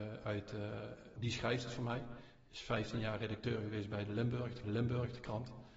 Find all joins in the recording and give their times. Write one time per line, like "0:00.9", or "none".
0:01.2
0:04.6